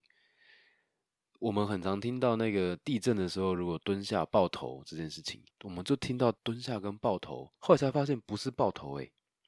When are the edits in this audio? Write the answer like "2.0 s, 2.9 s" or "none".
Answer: 5.5 s, 6.4 s, 7.6 s

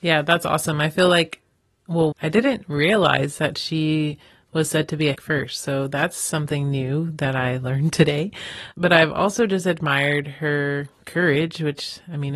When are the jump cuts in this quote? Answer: 2.1 s, 5.1 s, 8.7 s

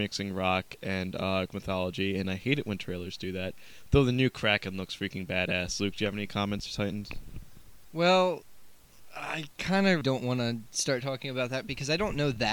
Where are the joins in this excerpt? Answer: 1.5 s, 6.7 s, 10.0 s

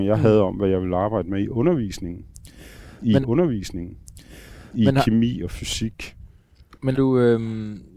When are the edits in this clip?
3.2 s, 6.9 s

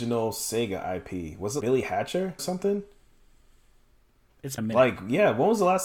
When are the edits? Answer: 1.6 s, 2.4 s, 4.6 s

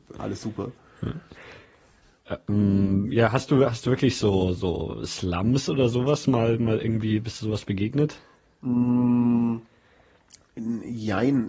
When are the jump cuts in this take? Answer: none

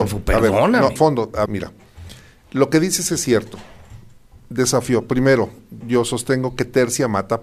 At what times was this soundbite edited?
1.0 s, 1.5 s, 5.8 s

